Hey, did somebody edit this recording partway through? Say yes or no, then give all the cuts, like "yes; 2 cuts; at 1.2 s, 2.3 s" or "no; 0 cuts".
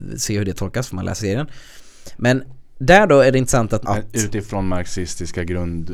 yes; 2 cuts; at 1.2 s, 3.8 s